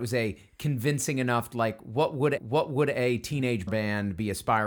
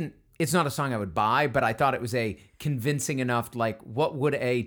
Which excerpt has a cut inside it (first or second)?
first